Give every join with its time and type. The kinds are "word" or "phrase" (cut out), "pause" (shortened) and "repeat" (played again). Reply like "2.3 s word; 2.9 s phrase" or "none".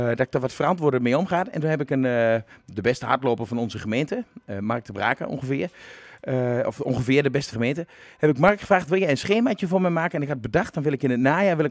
7.5 s phrase